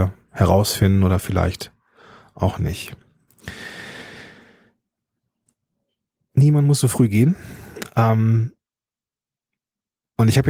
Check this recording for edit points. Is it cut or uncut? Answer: uncut